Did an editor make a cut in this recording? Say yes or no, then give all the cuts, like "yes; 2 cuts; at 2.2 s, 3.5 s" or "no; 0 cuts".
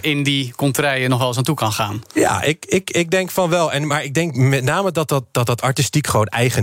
no; 0 cuts